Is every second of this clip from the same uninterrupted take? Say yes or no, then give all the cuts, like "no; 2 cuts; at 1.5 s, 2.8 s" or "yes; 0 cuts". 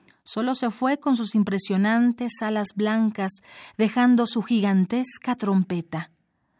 yes; 0 cuts